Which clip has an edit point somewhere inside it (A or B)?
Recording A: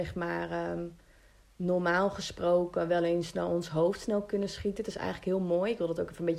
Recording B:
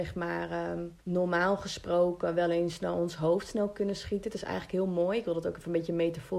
B